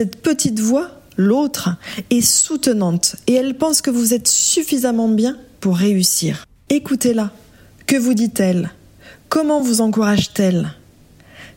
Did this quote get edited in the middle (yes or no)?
no